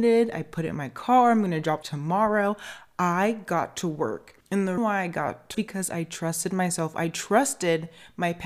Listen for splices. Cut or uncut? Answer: cut